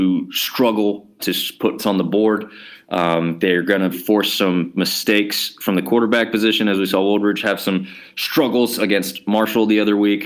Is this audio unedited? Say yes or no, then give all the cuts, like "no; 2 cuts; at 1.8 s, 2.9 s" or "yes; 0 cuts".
no; 3 cuts; at 1.2 s, 1.8 s, 3.9 s